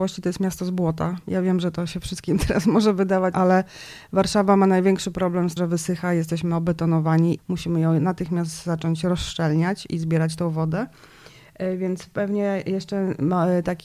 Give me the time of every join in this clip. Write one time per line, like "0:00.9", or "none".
0:03.3
0:05.6
0:07.4